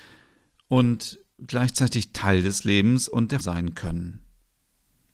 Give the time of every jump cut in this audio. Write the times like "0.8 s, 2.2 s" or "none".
3.4 s

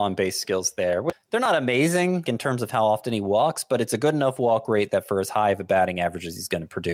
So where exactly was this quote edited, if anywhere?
1.1 s, 2.3 s

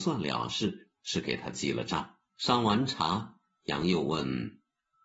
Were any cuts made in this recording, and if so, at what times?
1.0 s, 2.3 s

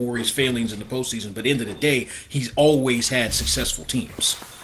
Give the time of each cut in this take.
none

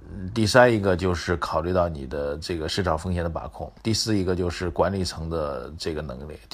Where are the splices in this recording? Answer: 3.8 s

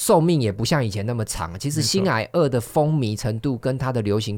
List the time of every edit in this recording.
none

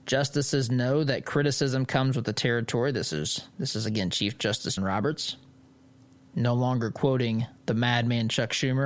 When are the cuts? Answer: 3.5 s, 4.8 s, 7.6 s

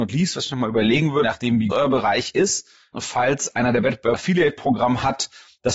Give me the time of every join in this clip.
1.2 s, 1.7 s, 2.9 s, 4.1 s

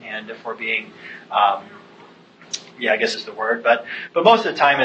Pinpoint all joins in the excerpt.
2.7 s, 3.1 s

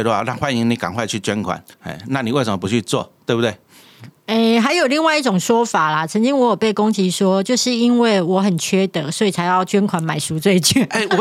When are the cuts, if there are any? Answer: 1.7 s

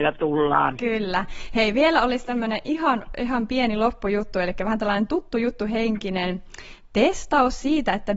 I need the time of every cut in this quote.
none

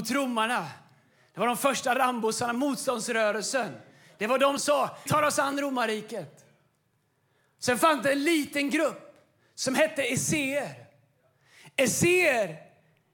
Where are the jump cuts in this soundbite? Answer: 4.6 s, 5.1 s

